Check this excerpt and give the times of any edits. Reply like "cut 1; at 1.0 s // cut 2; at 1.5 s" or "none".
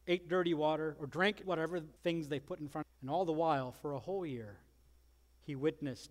cut 1; at 1.4 s // cut 2; at 2.0 s // cut 3; at 2.8 s